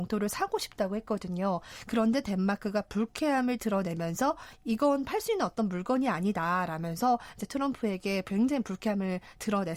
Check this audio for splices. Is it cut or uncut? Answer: uncut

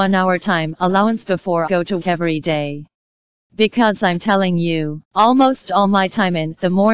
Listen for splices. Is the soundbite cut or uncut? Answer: cut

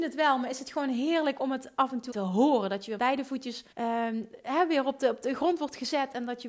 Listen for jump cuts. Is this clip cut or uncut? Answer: cut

